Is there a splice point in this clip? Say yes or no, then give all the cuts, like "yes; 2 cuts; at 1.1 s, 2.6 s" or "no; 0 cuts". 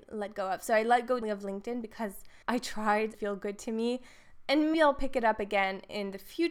yes; 4 cuts; at 1.2 s, 2.4 s, 3.1 s, 4.7 s